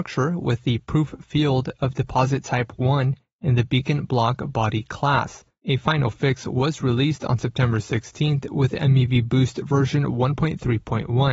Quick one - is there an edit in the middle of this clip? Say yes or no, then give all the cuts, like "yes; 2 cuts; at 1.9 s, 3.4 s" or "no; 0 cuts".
no; 0 cuts